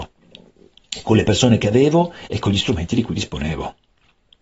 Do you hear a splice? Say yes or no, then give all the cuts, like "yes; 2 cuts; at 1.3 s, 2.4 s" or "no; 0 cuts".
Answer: no; 0 cuts